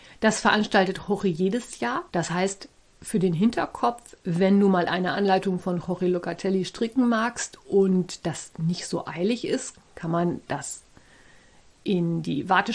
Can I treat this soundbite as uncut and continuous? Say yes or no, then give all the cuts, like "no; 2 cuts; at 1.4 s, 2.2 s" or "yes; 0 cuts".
no; 1 cut; at 2.1 s